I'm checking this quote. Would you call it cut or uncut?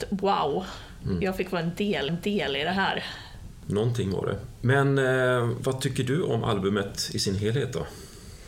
cut